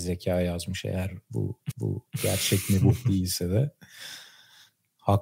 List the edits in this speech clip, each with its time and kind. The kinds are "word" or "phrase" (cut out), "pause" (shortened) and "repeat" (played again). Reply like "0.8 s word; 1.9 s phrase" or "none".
1.7 s repeat

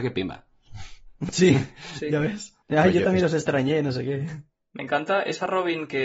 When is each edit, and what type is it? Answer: 2.6 s pause

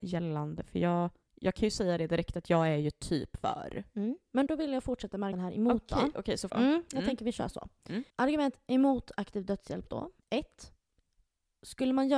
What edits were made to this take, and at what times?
1.2 s pause; 4.5 s word; 5.3 s word; 6.5 s phrase; 8.1 s pause; 10.2 s pause

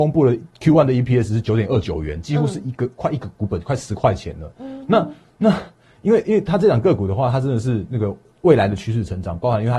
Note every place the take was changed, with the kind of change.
none

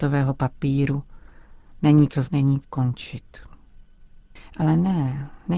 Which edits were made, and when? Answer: 2.2 s word; 2.6 s word

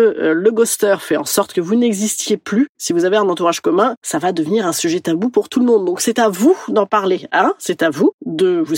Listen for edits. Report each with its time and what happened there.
none

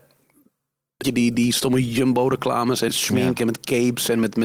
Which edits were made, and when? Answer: 1.0 s word; 1.3 s word; 2.9 s word

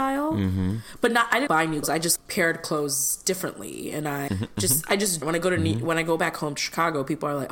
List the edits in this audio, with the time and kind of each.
1.5 s word; 1.8 s word; 2.2 s word; 4.3 s word; 5.2 s phrase

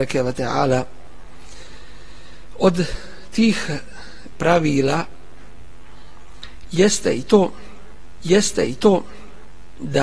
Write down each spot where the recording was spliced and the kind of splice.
4.3 s word; 8.2 s repeat

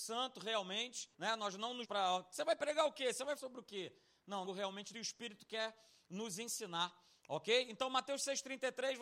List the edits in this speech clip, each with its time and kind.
1.1 s pause; 1.8 s word; 3.4 s word; 4.4 s phrase; 4.9 s phrase

